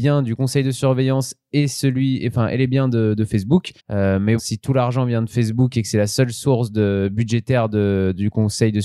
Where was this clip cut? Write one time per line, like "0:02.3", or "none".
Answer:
0:03.8
0:04.4